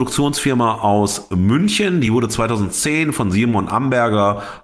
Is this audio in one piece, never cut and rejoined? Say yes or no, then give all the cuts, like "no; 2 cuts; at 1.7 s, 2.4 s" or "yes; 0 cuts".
yes; 0 cuts